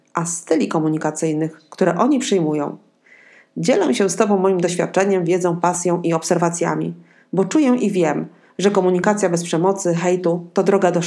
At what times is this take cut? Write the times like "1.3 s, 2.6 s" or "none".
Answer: none